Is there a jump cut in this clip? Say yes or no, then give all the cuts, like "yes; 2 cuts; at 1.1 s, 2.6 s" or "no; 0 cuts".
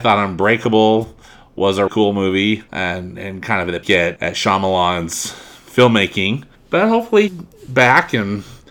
yes; 6 cuts; at 1.9 s, 2.7 s, 3.8 s, 4.2 s, 6.6 s, 7.3 s